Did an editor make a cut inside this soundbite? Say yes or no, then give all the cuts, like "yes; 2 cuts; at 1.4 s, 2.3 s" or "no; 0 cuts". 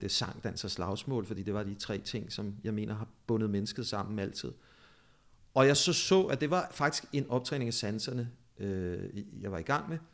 no; 0 cuts